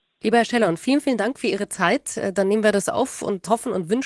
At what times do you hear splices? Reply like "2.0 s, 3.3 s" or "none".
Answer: none